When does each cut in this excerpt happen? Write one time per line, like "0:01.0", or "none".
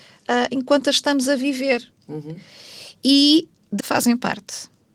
0:03.8